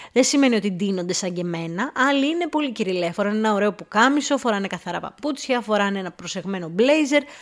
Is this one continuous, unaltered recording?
yes; 0 cuts

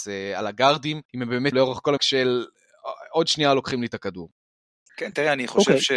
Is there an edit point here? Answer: yes; 3 cuts; at 1.1 s, 1.5 s, 2.0 s

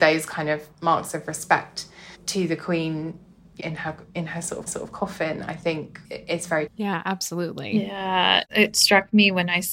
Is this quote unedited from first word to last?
no; 6 cuts; at 2.1 s, 3.6 s, 4.7 s, 6.0 s, 6.7 s, 8.4 s

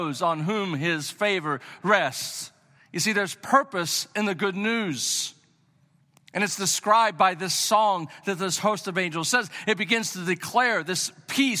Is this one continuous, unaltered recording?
yes; 0 cuts

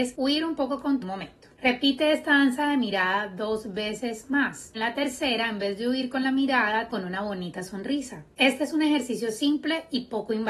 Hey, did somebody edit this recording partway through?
yes; 3 cuts; at 1.0 s, 4.7 s, 6.9 s

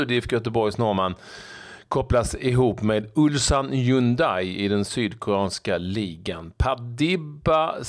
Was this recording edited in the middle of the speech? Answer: no; 0 cuts

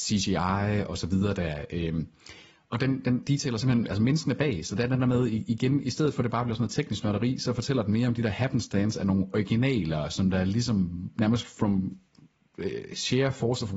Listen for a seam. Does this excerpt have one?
no; 0 cuts

